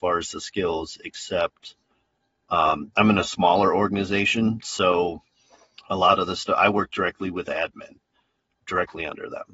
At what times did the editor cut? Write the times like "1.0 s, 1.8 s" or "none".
none